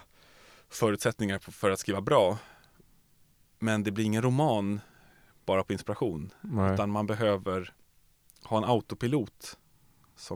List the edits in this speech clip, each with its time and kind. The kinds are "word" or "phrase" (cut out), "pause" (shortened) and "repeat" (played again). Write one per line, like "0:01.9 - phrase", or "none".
none